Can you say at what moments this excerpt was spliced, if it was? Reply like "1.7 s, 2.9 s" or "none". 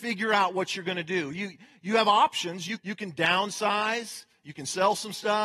2.8 s